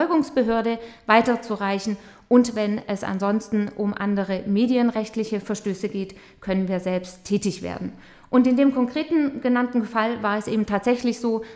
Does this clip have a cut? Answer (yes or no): no